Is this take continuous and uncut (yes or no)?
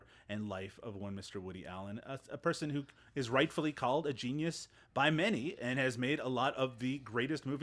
yes